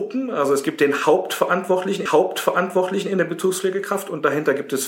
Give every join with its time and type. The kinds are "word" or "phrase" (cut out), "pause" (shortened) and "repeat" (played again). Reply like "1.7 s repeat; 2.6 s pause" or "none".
2.1 s repeat